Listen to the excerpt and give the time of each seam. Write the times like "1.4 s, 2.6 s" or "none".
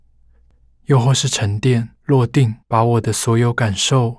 1.9 s, 2.6 s